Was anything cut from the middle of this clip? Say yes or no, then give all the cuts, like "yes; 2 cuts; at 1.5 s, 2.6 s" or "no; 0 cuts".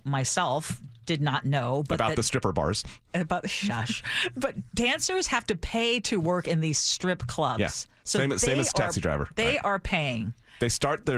no; 0 cuts